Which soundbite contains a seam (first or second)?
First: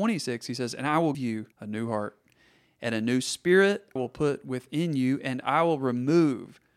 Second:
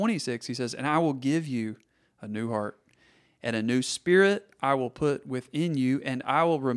first